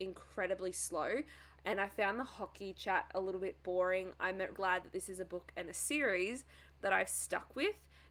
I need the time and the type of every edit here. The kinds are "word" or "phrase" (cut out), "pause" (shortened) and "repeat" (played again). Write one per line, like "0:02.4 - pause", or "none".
0:04.5 - word